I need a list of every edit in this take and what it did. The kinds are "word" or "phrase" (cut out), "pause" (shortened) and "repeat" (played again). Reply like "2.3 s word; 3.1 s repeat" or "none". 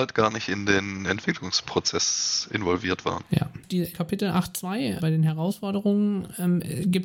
3.9 s word; 5.0 s word